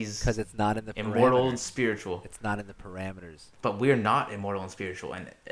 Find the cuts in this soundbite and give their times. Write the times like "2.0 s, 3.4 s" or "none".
3.5 s